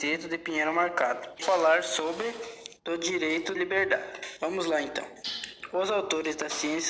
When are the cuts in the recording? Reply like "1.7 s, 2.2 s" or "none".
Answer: 1.4 s, 2.8 s, 3.5 s